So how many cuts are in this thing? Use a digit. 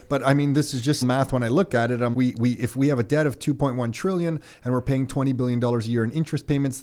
2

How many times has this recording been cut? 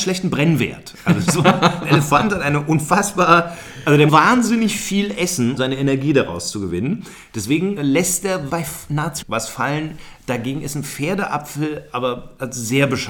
6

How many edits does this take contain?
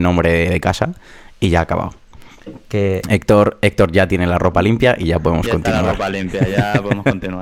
0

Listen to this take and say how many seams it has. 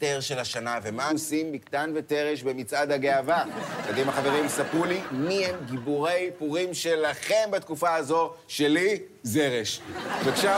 1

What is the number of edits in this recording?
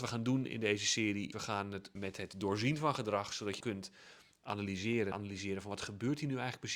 4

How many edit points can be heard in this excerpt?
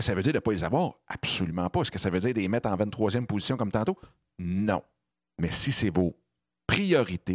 1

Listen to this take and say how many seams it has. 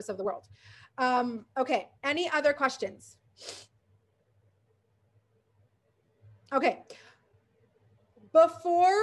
1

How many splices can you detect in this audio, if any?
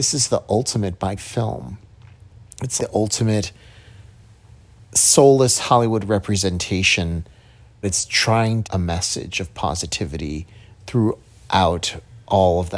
4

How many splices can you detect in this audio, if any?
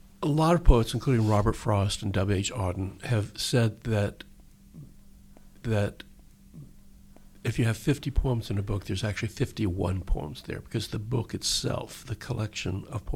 1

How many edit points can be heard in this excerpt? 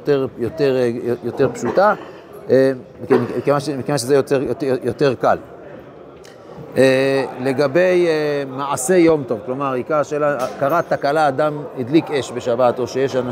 0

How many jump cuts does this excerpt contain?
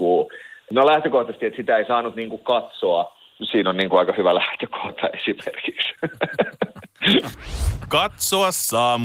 0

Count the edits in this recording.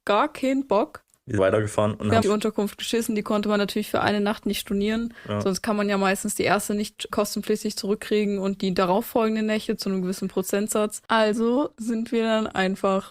3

